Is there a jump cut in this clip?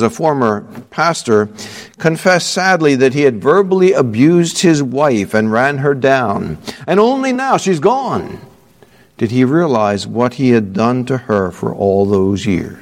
no; 0 cuts

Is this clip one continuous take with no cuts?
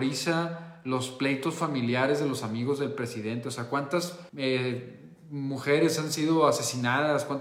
no; 1 cut; at 4.3 s

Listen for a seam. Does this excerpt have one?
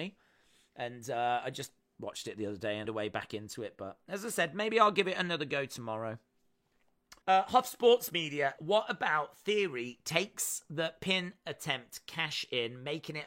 yes; 3 cuts; at 2.8 s, 7.2 s, 8.6 s

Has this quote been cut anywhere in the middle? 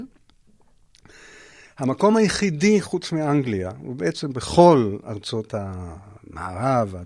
no; 0 cuts

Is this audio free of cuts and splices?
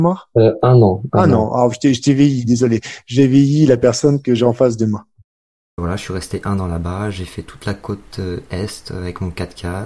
yes; 0 cuts

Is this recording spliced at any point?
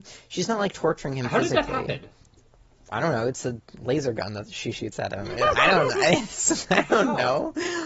no; 0 cuts

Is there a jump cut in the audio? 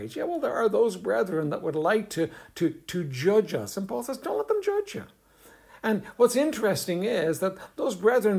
no; 0 cuts

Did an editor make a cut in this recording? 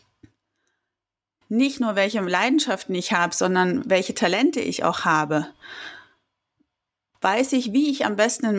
no; 0 cuts

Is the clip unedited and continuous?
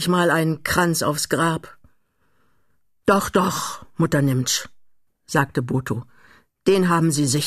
yes; 0 cuts

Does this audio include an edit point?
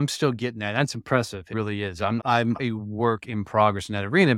yes; 3 cuts; at 1.5 s, 2.2 s, 2.6 s

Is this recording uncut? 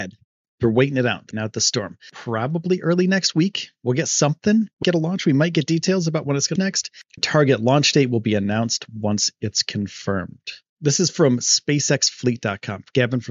no; 5 cuts; at 1.3 s, 4.8 s, 6.6 s, 7.2 s, 10.7 s

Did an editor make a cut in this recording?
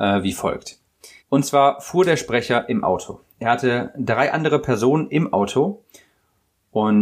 yes; 1 cut; at 1.2 s

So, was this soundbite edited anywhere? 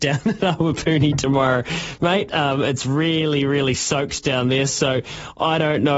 no; 0 cuts

